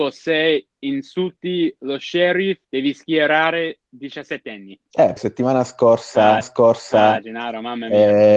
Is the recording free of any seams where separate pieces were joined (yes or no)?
no